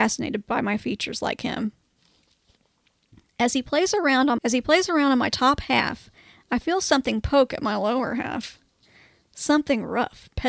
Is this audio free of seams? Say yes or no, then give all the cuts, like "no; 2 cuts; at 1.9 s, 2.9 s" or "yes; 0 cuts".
no; 1 cut; at 4.4 s